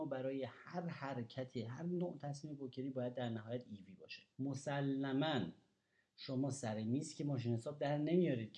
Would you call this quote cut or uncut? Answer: cut